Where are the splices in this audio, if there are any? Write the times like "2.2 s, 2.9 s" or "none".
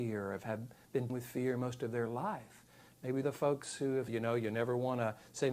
1.1 s, 3.2 s, 4.1 s